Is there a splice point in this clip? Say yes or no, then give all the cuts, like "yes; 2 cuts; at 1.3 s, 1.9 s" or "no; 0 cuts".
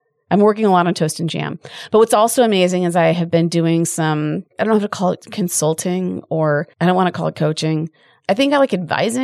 yes; 2 cuts; at 4.5 s, 6.7 s